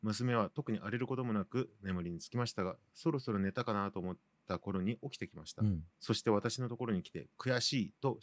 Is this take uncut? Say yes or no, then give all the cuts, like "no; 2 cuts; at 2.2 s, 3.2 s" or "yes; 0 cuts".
no; 1 cut; at 5.9 s